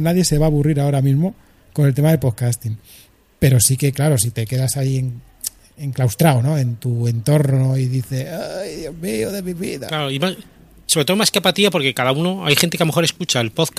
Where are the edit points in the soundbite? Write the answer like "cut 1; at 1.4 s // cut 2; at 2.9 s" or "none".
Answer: none